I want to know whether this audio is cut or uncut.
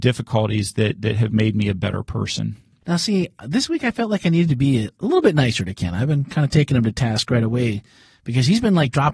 uncut